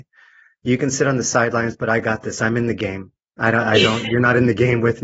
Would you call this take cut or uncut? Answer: uncut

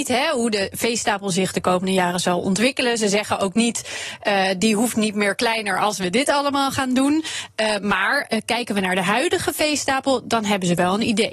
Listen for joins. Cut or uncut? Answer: uncut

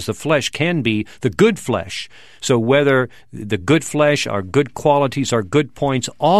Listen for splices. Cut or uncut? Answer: uncut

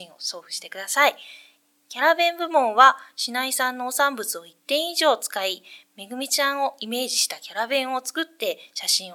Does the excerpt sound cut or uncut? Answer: uncut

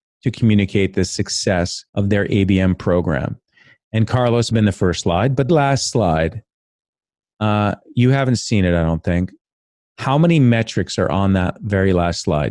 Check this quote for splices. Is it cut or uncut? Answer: cut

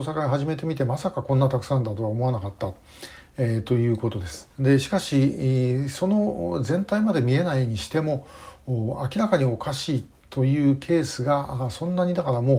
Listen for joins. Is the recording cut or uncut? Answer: cut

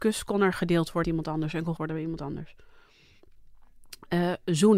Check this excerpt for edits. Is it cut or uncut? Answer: cut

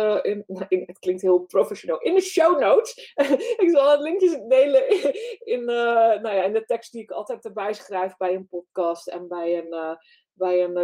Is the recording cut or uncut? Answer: uncut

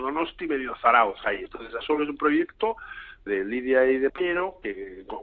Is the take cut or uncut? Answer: cut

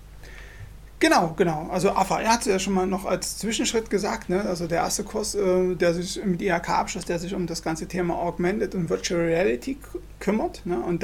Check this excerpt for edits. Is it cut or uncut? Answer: uncut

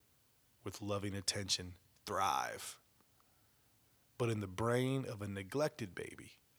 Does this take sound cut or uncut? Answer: uncut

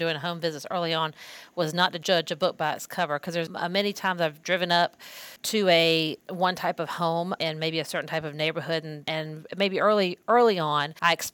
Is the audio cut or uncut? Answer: cut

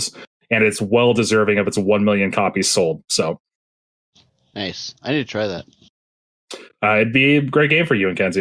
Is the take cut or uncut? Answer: uncut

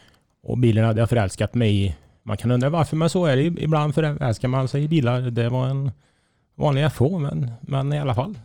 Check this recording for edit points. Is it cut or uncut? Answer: uncut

